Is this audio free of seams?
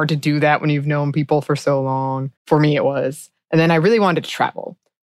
no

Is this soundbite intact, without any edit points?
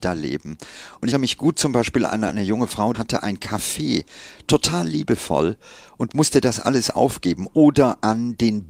no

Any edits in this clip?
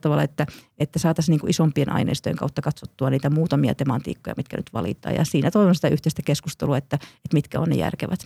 no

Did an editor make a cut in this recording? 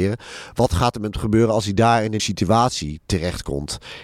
yes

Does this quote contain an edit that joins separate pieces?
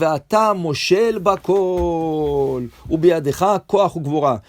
no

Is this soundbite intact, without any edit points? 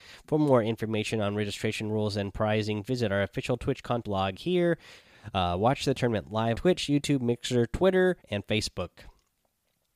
no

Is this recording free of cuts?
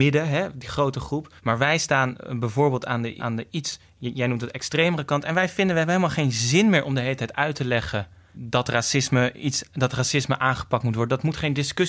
no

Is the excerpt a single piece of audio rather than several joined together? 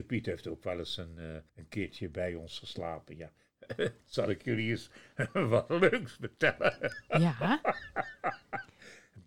no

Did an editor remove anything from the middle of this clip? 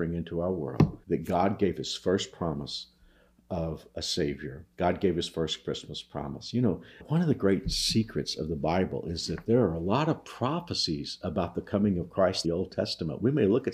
yes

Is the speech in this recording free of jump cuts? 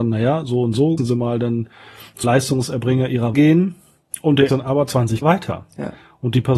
no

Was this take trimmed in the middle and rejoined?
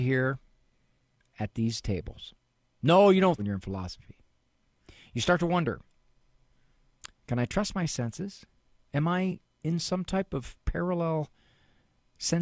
yes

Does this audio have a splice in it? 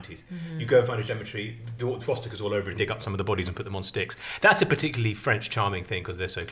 yes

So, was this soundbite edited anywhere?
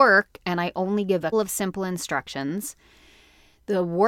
yes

